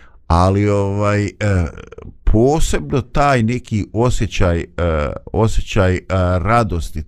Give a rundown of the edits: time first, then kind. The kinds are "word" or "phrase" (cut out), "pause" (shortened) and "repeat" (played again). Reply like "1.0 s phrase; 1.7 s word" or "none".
none